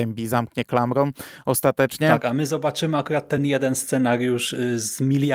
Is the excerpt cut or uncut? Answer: uncut